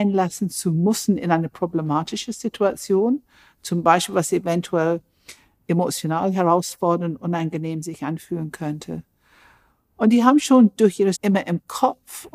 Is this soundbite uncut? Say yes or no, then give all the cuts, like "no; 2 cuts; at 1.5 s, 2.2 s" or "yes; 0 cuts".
no; 1 cut; at 11.1 s